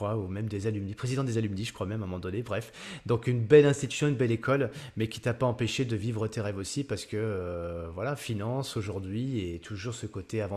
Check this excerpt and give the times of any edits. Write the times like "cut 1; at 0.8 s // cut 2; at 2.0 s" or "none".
none